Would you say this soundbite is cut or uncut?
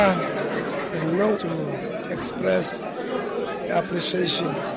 cut